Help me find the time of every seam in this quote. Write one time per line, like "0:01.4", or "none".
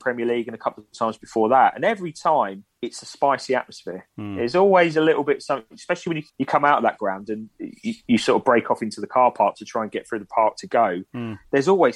0:06.3